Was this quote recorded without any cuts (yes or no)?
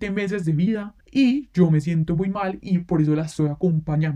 no